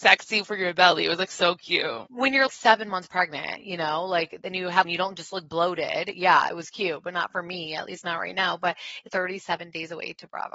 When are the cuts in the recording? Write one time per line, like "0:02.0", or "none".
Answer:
0:02.5
0:04.8
0:09.1

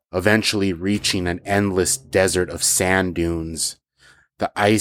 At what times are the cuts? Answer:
none

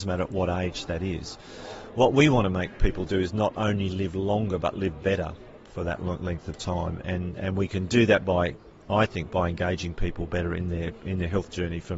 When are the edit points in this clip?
none

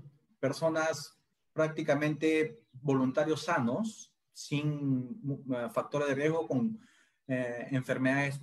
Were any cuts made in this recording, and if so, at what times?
none

